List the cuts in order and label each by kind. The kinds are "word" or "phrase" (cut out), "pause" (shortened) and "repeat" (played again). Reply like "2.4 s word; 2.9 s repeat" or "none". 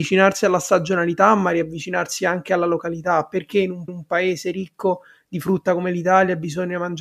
3.9 s repeat